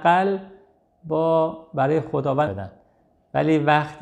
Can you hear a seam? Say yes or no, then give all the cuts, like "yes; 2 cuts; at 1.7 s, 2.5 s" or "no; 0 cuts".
yes; 1 cut; at 2.5 s